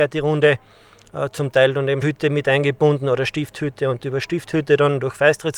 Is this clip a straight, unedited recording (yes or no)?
no